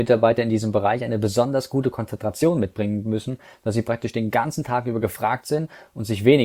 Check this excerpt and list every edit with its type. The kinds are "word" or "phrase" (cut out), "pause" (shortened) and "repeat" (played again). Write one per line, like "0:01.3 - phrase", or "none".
none